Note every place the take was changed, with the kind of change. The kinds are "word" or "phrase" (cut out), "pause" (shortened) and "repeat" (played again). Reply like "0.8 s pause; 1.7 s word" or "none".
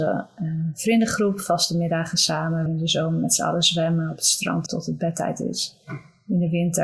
2.7 s word; 4.7 s word